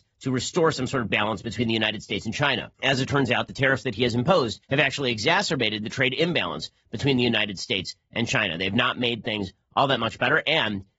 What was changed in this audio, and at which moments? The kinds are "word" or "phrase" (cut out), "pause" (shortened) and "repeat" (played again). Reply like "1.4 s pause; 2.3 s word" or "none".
1.1 s word; 2.7 s pause; 4.6 s pause